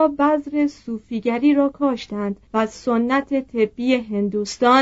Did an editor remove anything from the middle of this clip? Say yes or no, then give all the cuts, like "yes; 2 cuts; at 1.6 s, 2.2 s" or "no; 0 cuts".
yes; 1 cut; at 2.5 s